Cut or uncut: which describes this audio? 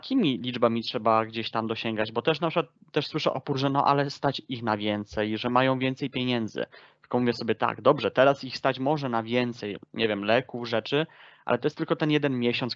uncut